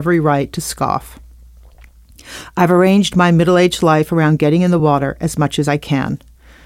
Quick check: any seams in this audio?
no; 0 cuts

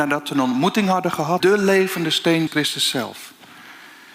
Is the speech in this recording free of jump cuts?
no; 2 cuts; at 1.4 s, 2.5 s

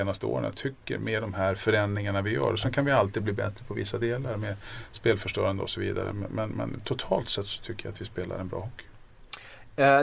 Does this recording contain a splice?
no; 0 cuts

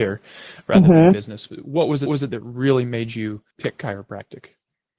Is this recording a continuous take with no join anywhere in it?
no; 2 cuts; at 2.1 s, 3.5 s

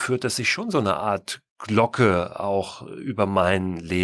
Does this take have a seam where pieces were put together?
no; 0 cuts

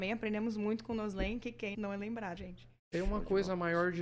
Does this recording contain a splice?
yes; 2 cuts; at 1.7 s, 2.4 s

